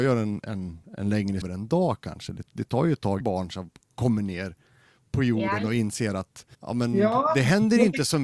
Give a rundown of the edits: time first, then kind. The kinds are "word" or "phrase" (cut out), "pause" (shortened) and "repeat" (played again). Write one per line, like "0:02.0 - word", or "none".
0:01.4 - phrase
0:03.2 - phrase
0:06.5 - pause

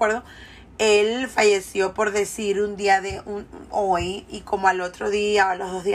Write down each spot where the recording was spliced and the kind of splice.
none

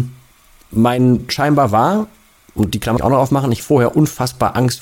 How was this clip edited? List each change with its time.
0:01.3 - word
0:03.0 - word
0:03.6 - word

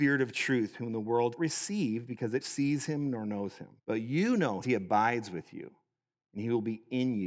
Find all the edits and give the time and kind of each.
0:01.4 - word
0:02.4 - word
0:03.8 - pause
0:04.6 - phrase

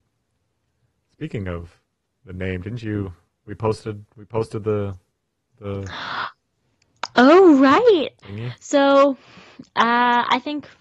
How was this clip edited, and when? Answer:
none

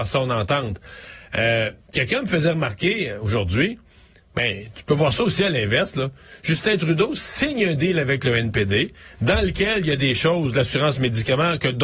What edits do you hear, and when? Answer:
none

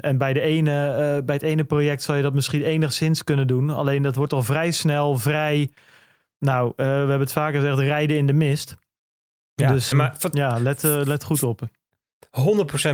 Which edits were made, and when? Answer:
0:09.9 - word

